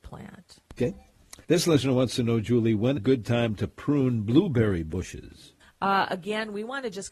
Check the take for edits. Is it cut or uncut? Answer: cut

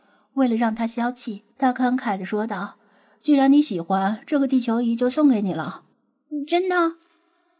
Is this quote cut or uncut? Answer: cut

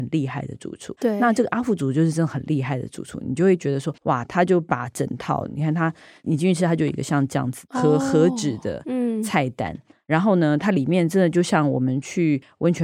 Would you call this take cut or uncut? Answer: cut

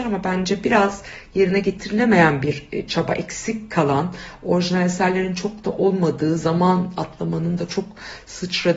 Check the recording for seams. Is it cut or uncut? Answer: uncut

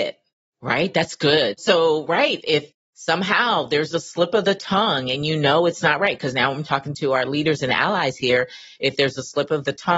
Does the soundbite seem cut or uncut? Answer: uncut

